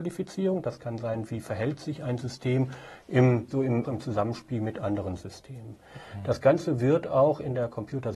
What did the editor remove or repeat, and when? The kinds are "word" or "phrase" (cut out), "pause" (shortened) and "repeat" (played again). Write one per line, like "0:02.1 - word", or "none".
0:03.5 - word
0:03.8 - phrase